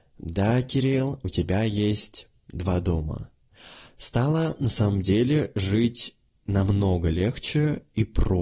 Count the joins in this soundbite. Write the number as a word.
zero